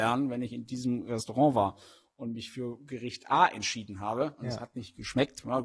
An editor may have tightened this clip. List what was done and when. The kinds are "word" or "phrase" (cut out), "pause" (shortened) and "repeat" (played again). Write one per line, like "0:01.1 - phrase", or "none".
none

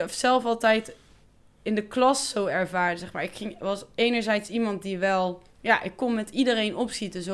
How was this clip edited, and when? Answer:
0:05.5 - pause

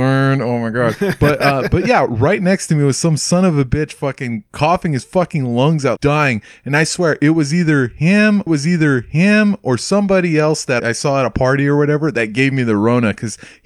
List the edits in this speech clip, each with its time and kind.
0:06.0 - word
0:08.5 - repeat
0:10.8 - word

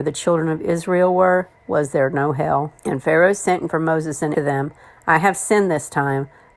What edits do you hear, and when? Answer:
0:01.6 - pause
0:02.8 - pause
0:03.7 - word
0:04.3 - phrase

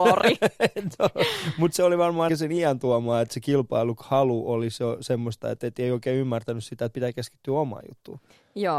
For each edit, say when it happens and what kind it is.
0:02.3 - word

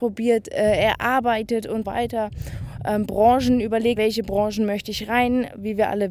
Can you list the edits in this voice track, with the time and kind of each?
0:01.8 - word
0:04.0 - word

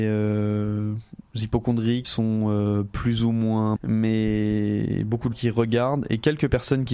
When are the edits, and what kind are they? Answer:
0:02.0 - word
0:03.8 - word
0:05.3 - word

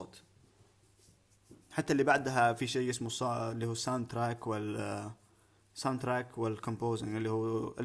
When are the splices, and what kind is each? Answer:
none

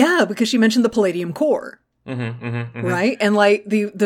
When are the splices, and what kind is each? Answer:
none

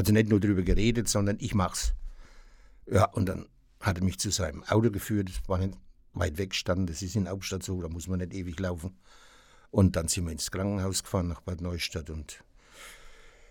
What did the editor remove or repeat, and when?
none

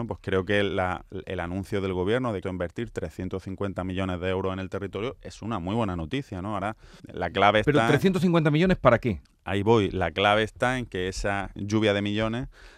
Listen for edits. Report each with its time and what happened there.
0:02.4 - phrase
0:07.0 - pause
0:09.2 - pause
0:11.6 - word

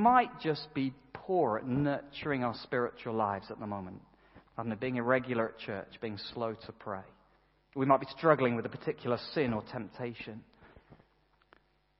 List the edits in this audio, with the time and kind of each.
none

